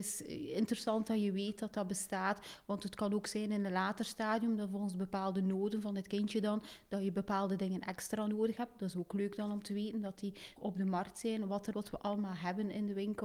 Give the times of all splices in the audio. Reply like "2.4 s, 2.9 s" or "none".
10.6 s, 11.7 s